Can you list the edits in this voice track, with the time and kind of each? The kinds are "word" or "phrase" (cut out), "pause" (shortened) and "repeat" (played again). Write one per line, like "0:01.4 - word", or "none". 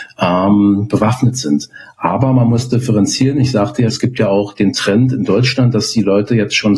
0:03.9 - word